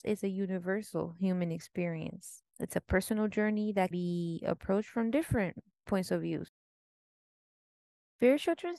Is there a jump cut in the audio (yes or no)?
yes